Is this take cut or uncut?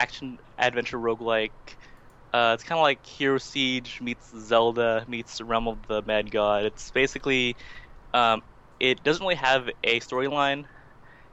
uncut